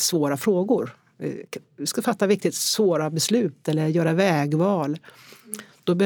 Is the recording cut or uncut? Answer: uncut